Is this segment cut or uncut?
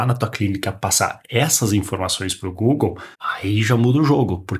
cut